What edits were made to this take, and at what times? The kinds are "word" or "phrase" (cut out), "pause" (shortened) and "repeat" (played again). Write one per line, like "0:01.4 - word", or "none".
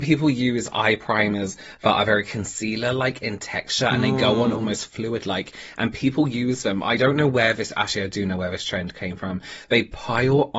none